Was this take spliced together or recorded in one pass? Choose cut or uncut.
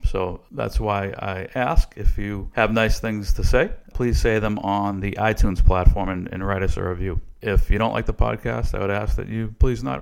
uncut